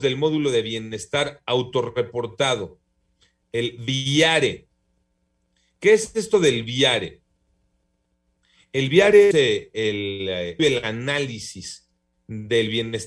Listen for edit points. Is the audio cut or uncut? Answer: cut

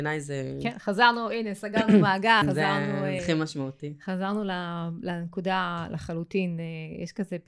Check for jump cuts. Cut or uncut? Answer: cut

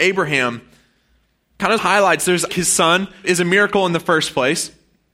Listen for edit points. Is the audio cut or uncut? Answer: cut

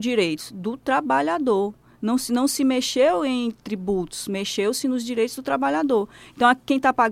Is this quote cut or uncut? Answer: uncut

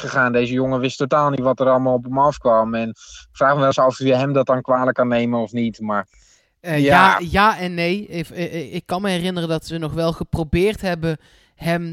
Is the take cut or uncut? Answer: uncut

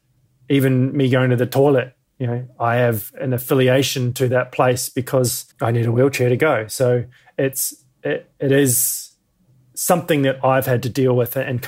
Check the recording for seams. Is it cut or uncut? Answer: cut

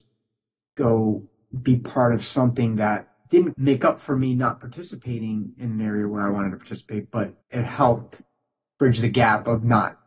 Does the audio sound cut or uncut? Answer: cut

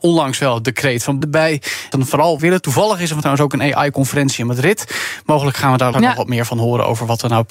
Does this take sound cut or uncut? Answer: cut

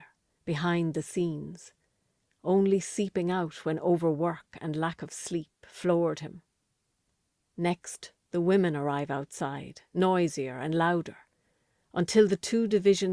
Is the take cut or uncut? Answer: uncut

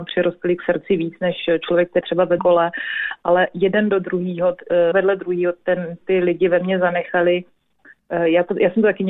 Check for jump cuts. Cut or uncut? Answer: cut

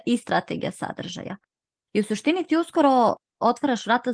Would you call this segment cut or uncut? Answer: uncut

